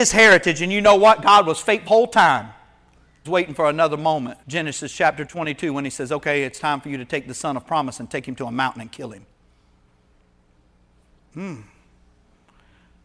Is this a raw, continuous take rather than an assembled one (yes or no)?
no